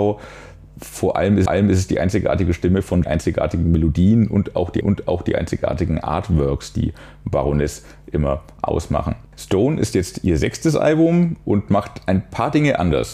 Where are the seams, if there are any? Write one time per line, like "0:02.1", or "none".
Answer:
0:01.5
0:03.0
0:04.8
0:09.3